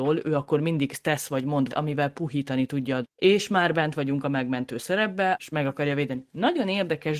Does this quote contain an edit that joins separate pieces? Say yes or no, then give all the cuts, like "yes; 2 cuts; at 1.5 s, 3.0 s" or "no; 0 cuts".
yes; 3 cuts; at 1.7 s, 3.0 s, 5.3 s